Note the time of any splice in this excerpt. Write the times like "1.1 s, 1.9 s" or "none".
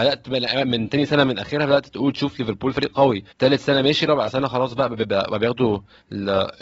3.3 s